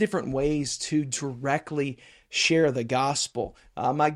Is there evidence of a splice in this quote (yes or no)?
no